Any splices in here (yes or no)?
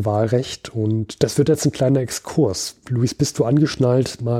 no